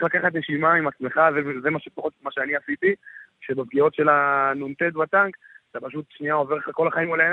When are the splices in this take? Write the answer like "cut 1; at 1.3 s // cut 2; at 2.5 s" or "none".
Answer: none